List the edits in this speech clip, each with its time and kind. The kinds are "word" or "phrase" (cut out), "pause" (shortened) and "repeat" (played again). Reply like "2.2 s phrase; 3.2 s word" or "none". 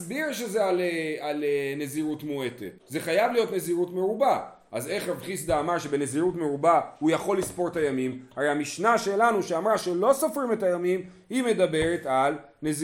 2.8 s pause